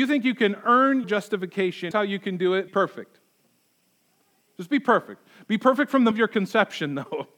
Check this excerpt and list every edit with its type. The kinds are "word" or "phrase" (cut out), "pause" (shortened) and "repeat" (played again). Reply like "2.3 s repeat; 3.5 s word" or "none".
1.0 s word; 1.9 s word; 2.7 s word; 6.1 s word